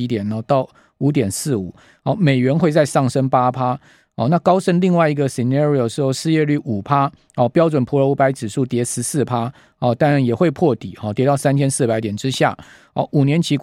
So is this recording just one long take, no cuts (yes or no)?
yes